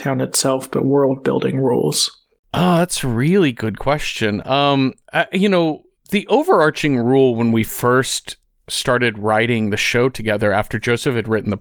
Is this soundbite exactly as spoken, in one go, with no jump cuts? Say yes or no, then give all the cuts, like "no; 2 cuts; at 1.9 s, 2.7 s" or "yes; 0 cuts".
yes; 0 cuts